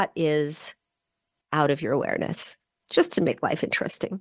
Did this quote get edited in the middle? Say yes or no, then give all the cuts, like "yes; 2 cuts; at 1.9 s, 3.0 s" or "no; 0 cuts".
no; 0 cuts